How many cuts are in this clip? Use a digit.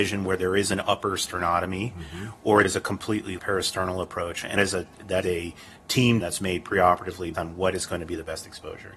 6